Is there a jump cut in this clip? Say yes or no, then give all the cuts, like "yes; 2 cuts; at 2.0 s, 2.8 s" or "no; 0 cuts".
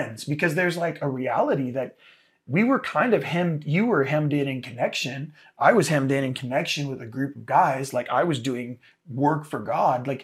no; 0 cuts